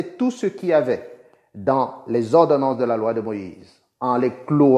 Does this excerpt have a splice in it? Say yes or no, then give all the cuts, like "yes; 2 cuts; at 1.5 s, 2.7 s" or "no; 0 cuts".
no; 0 cuts